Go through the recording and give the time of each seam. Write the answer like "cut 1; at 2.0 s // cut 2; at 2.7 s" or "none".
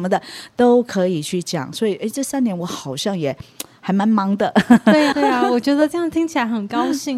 cut 1; at 5.1 s

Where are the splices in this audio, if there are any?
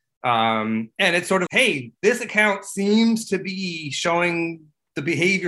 cut 1; at 1.5 s

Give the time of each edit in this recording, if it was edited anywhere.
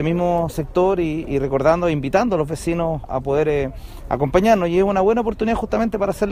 cut 1; at 3.0 s

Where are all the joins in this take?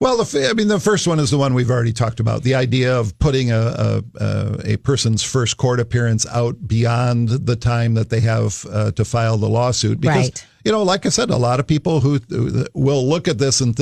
none

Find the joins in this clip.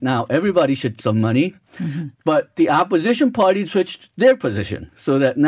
cut 1; at 1.0 s // cut 2; at 3.6 s

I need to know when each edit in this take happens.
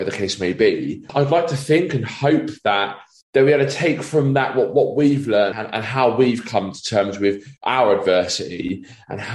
cut 1; at 5.5 s // cut 2; at 7.6 s

